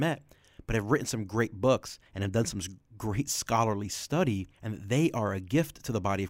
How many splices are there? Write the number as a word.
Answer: two